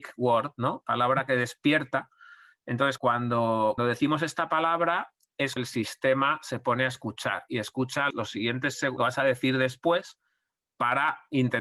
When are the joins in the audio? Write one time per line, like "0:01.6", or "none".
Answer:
0:03.0
0:03.8
0:05.6
0:08.1
0:09.0